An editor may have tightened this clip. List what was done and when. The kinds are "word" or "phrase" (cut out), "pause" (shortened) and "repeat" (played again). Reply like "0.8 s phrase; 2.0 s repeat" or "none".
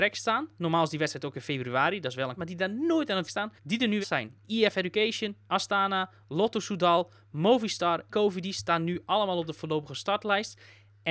2.4 s word; 3.3 s word; 3.6 s pause; 4.0 s word; 4.4 s pause; 8.1 s word